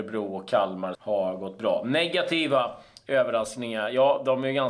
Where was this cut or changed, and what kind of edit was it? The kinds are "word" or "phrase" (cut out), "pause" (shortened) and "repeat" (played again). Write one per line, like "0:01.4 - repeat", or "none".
0:00.9 - word